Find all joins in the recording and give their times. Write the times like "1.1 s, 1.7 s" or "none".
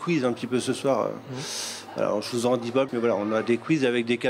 2.9 s